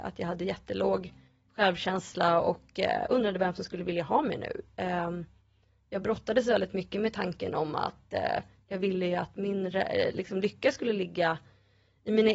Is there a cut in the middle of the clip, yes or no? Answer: no